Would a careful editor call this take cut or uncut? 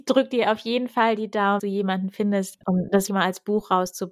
cut